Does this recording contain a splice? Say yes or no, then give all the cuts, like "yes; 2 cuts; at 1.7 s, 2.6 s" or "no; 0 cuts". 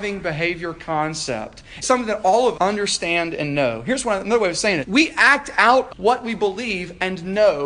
yes; 4 cuts; at 1.8 s, 2.5 s, 4.8 s, 5.9 s